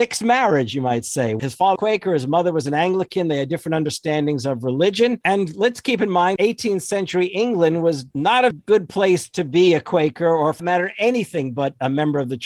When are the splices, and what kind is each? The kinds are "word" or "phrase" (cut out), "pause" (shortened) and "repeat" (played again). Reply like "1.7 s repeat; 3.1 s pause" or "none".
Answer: 1.8 s phrase; 6.4 s word; 8.5 s word; 10.6 s word

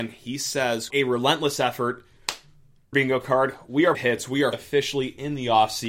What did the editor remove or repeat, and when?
0.9 s word; 2.9 s phrase; 3.9 s phrase; 4.5 s word

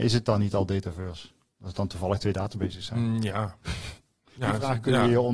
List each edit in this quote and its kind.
none

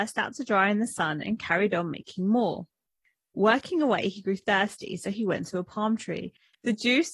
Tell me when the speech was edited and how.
none

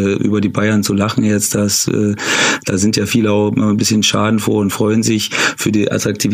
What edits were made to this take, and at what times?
none

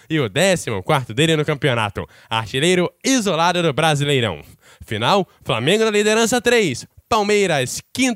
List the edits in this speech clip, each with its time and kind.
none

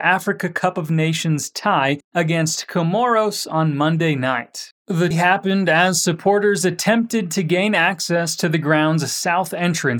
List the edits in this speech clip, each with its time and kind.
5.1 s word

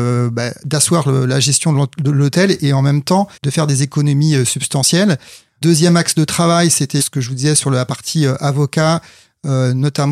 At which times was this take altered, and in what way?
3.4 s pause

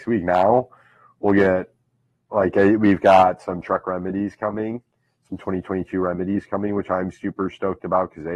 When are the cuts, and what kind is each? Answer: none

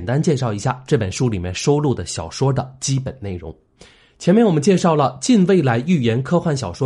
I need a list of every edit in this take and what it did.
none

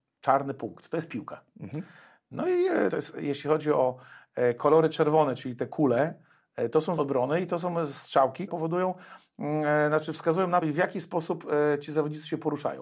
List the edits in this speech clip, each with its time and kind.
2.9 s word; 7.0 s word; 8.5 s word; 10.6 s word

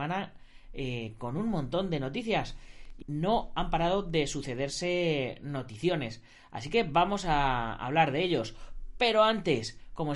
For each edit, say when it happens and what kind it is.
3.0 s word

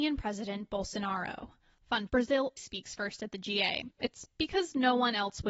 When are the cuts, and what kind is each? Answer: 2.1 s word; 2.6 s word; 3.9 s pause

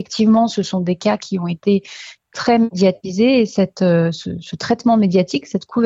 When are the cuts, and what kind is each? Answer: none

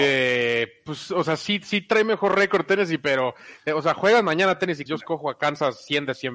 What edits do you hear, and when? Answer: 4.9 s phrase

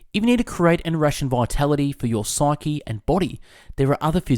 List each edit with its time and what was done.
none

